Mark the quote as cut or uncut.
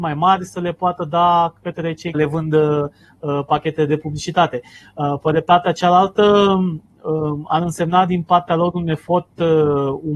cut